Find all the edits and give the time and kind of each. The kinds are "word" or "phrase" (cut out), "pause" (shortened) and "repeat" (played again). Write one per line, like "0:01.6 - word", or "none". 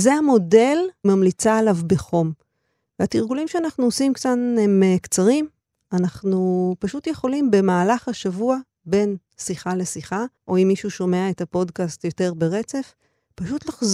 0:01.0 - word
0:10.4 - pause